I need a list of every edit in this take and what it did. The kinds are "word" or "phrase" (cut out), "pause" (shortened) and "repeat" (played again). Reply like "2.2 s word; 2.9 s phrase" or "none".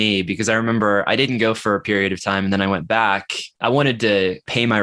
3.5 s pause